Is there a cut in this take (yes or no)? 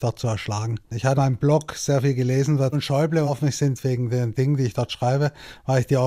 yes